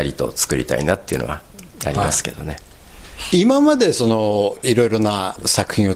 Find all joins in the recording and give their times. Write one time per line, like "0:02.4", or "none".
0:01.7